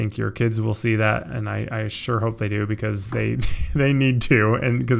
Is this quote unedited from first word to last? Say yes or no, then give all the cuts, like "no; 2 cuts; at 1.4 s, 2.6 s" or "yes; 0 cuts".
yes; 0 cuts